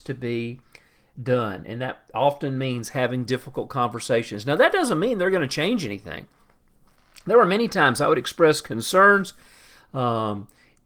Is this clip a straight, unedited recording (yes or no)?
yes